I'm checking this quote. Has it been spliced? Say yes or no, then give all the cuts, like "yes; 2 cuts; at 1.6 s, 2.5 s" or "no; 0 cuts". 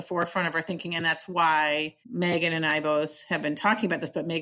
yes; 1 cut; at 2.0 s